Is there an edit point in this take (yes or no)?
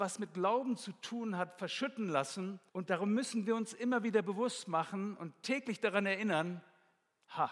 yes